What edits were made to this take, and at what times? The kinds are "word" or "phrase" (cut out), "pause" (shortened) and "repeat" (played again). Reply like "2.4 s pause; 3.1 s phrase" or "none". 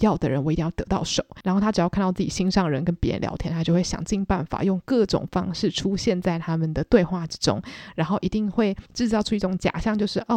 8.9 s pause